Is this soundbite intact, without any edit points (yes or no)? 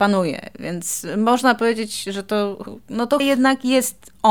no